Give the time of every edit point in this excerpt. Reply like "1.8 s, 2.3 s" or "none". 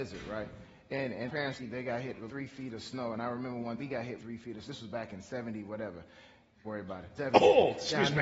1.3 s, 1.6 s, 2.3 s, 3.8 s, 4.2 s, 4.7 s, 6.6 s, 7.2 s